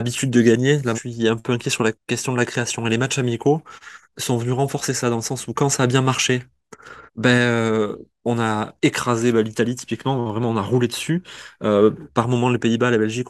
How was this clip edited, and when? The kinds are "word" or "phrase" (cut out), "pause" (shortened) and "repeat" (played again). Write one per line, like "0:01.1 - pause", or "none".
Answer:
0:00.9 - phrase
0:02.0 - pause
0:04.0 - pause
0:07.1 - pause